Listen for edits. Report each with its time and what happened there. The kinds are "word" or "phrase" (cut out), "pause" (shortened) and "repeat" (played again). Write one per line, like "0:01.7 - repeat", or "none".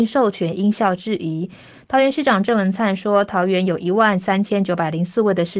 none

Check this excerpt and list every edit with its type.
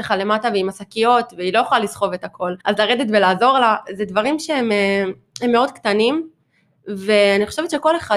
0:02.6 - pause

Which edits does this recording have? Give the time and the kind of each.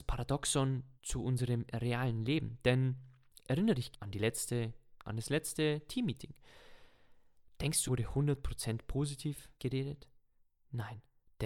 0:01.0 - pause
0:03.9 - phrase
0:05.0 - word
0:07.9 - word
0:09.6 - pause

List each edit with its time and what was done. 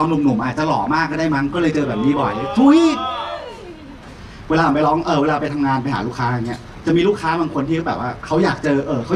none

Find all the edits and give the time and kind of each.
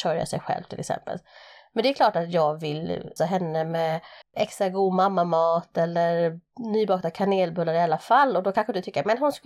0:03.2 - word
0:04.2 - pause

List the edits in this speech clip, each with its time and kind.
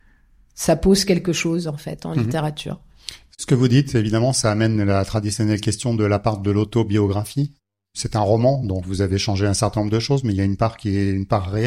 none

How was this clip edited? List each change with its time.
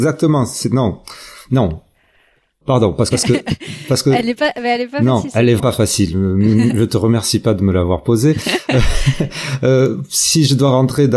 0:03.1 - word
0:05.6 - word

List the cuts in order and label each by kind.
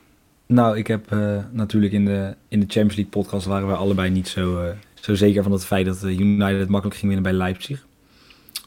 0:04.8 - pause

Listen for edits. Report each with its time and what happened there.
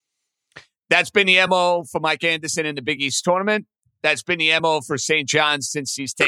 none

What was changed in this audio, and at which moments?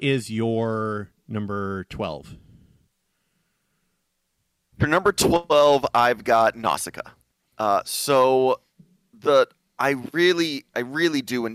none

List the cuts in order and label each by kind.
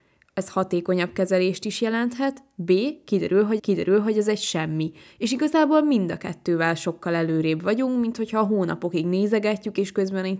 0:03.6 - repeat

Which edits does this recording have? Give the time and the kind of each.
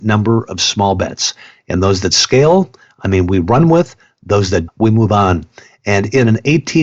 0:04.7 - word

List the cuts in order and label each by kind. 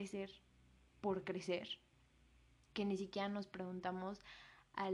none

